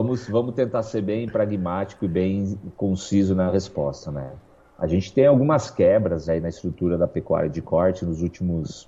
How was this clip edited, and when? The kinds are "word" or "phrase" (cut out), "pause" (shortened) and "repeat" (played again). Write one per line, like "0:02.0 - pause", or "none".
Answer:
none